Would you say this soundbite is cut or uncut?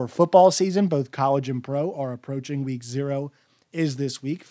uncut